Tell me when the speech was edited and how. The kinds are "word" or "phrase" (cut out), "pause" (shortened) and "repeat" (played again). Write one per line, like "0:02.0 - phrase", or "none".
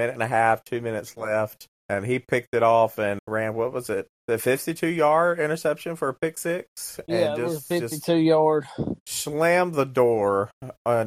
0:01.8 - pause
0:03.2 - word
0:04.2 - pause